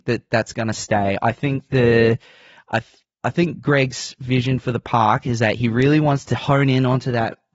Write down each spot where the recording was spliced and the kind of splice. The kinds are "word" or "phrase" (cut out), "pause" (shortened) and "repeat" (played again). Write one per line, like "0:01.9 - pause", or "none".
0:03.1 - pause